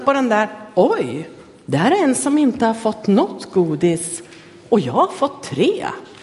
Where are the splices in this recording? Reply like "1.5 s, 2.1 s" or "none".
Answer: none